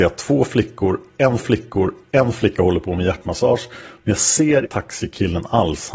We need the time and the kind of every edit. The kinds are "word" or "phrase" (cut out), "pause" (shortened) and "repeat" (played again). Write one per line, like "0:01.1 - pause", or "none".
0:01.4 - repeat
0:04.7 - word